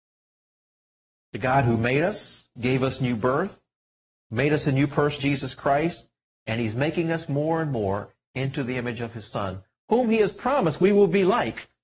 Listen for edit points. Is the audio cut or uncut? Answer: cut